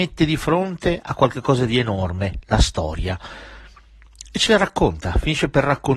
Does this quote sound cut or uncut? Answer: uncut